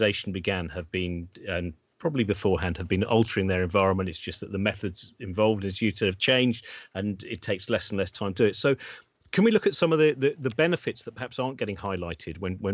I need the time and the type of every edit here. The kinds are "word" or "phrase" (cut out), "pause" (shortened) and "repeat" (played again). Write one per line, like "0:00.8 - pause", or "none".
none